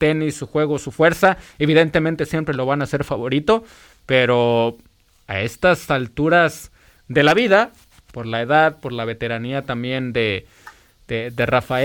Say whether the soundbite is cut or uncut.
uncut